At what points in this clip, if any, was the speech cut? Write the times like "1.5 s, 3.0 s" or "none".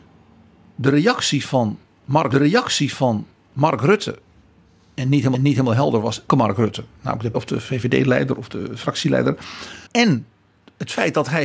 2.3 s, 5.3 s, 6.3 s, 7.3 s, 9.9 s